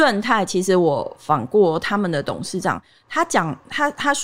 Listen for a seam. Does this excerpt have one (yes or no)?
no